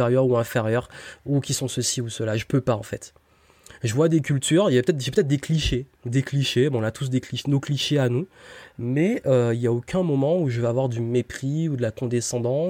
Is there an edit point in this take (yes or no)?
yes